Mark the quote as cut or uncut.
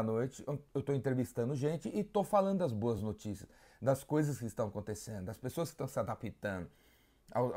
uncut